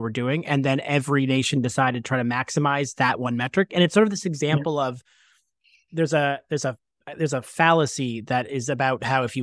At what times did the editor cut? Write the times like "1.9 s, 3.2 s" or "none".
none